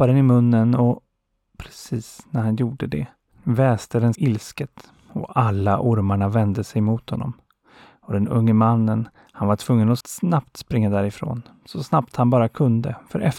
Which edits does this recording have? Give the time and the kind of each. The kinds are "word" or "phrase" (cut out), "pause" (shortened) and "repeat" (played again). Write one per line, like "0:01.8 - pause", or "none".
0:04.1 - phrase
0:10.0 - word

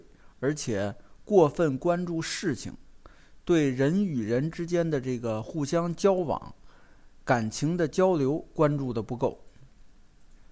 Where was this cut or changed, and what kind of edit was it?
none

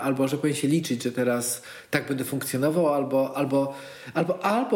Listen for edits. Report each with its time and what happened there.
none

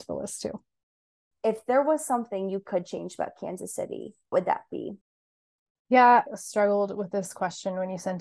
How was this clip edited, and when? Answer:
0:04.3 - word
0:06.3 - word

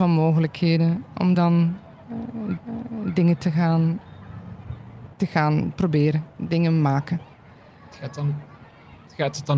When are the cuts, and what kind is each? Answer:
0:01.3 - word
0:02.6 - repeat
0:05.1 - pause
0:06.4 - word

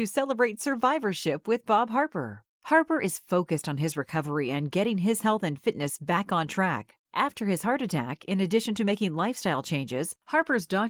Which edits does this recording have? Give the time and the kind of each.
none

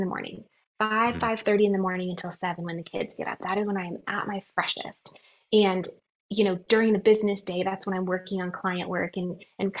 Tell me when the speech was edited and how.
none

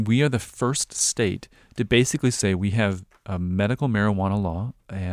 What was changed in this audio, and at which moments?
none

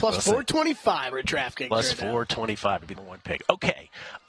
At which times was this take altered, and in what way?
0:01.1 - word
0:03.0 - word

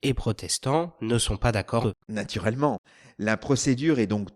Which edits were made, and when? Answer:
0:01.8 - word

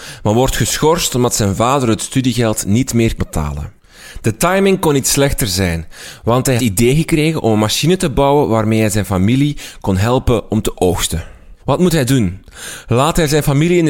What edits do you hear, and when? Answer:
0:03.2 - word
0:06.6 - phrase
0:11.6 - pause

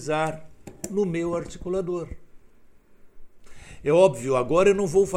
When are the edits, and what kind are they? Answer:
none

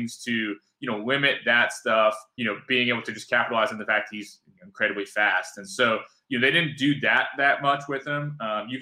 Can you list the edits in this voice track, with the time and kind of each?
0:02.4 - phrase

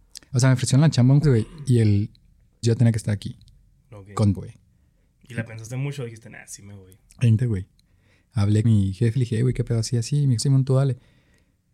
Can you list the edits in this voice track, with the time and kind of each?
0:01.2 - word
0:02.6 - word
0:04.4 - word
0:07.4 - word
0:08.6 - word
0:09.2 - word
0:10.4 - word

